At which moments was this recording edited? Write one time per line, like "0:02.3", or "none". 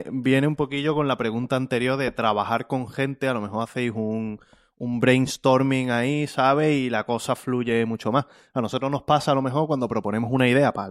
none